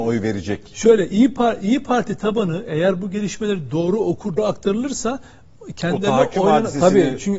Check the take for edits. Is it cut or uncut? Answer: cut